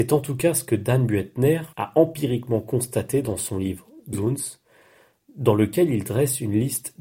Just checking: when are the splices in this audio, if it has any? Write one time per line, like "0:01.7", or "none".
0:01.7
0:04.1